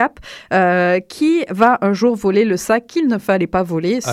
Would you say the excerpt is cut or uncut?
uncut